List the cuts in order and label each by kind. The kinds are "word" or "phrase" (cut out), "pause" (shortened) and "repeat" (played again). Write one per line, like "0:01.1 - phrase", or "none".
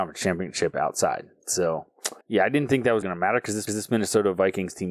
0:02.2 - pause
0:03.0 - word
0:03.7 - repeat